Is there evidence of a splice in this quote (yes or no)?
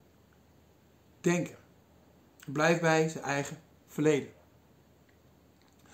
no